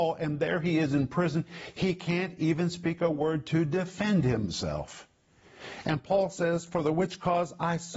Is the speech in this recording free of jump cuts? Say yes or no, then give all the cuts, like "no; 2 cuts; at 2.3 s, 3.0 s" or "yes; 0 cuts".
yes; 0 cuts